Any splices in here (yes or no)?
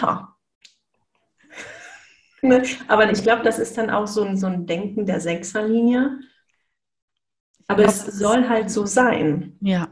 no